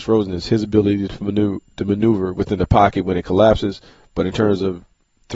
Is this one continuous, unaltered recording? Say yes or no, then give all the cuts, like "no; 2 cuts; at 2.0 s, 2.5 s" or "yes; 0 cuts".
yes; 0 cuts